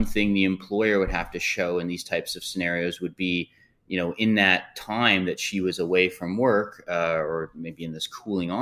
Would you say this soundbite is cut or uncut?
uncut